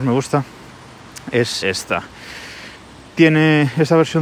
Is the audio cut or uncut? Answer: cut